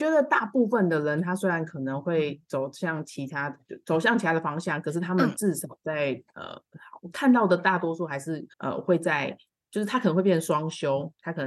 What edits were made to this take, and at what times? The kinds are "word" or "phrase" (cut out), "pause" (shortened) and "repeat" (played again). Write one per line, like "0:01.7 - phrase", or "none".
0:08.5 - pause